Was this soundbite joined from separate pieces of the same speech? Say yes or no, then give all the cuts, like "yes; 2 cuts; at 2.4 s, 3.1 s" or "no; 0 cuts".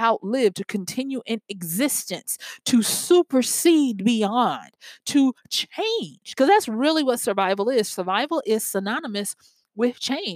no; 0 cuts